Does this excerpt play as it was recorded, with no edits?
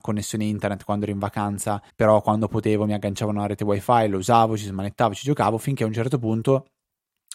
no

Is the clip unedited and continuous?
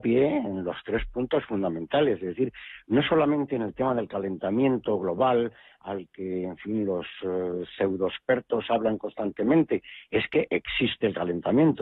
yes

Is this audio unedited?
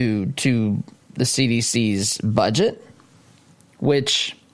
yes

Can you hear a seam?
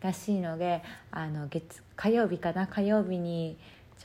no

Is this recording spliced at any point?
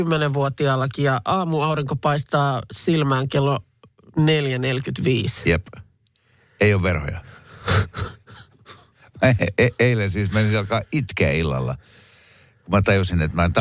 no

